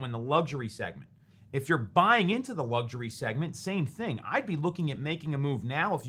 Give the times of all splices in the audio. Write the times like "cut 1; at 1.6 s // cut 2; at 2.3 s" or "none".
none